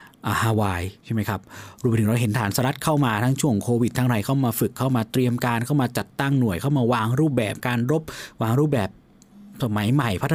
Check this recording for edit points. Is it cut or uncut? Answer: cut